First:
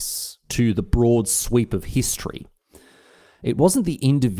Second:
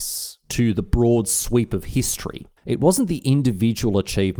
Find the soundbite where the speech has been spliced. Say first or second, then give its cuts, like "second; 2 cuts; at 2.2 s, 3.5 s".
second; 1 cut; at 2.6 s